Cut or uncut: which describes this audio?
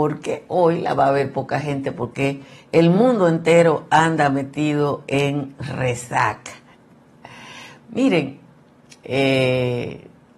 uncut